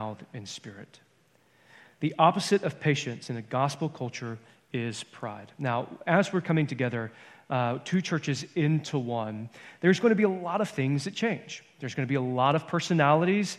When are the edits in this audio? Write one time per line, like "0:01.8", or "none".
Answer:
none